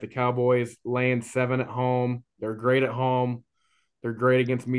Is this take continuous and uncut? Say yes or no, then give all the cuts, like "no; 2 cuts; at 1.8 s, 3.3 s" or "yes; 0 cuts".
yes; 0 cuts